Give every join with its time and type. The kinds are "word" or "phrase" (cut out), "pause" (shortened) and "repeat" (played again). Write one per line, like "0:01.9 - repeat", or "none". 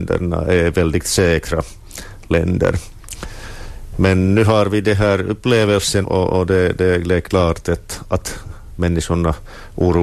0:06.0 - word